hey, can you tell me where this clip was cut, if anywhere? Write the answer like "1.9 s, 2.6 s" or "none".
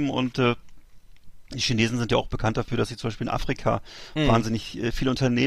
none